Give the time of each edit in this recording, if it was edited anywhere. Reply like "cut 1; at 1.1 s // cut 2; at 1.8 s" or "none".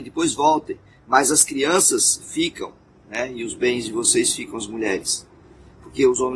none

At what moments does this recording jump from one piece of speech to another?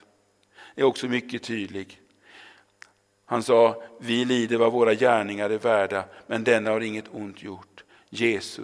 none

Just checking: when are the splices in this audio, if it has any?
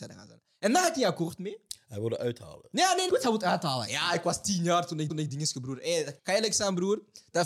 cut 1; at 3.1 s // cut 2; at 5.1 s // cut 3; at 6.2 s

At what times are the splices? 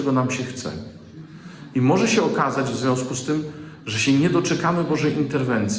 none

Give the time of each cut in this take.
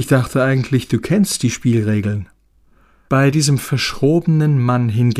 none

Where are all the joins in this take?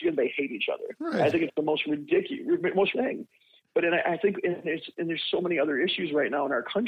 cut 1; at 2.9 s

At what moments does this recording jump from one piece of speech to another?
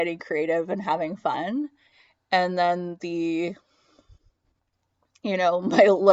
none

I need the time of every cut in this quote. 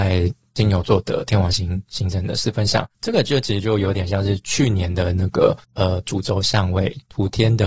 cut 1; at 2.9 s // cut 2; at 5.6 s

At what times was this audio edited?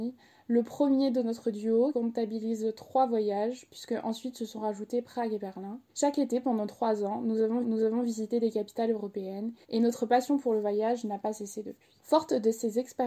cut 1; at 1.9 s // cut 2; at 5.9 s // cut 3; at 7.6 s // cut 4; at 9.6 s // cut 5; at 12.0 s

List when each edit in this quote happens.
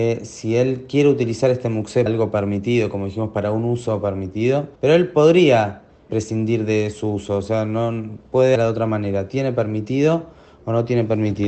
cut 1; at 2.1 s // cut 2; at 4.8 s // cut 3; at 6.1 s // cut 4; at 8.6 s

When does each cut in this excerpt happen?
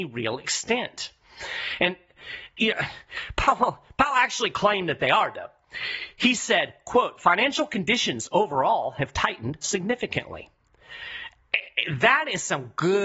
none

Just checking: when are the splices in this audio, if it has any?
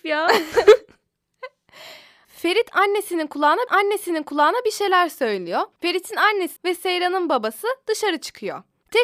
cut 1; at 3.7 s // cut 2; at 5.7 s // cut 3; at 6.6 s

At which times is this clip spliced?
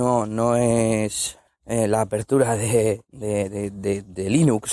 cut 1; at 1.5 s

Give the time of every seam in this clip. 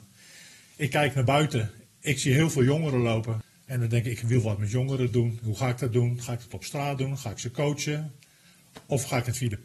none

